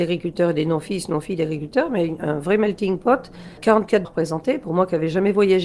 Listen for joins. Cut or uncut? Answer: cut